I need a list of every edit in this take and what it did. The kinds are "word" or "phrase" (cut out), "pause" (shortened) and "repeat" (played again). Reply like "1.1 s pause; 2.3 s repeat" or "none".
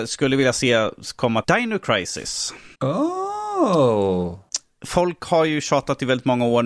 1.4 s word; 2.7 s pause